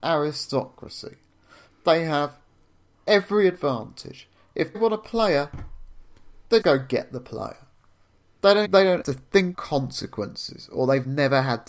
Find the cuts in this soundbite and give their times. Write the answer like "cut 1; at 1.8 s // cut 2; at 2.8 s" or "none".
cut 1; at 4.7 s // cut 2; at 6.6 s // cut 3; at 8.6 s // cut 4; at 9.0 s // cut 5; at 9.5 s